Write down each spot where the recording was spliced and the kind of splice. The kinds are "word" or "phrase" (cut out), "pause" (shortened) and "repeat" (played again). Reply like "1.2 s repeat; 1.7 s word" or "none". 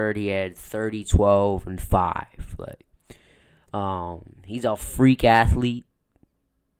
none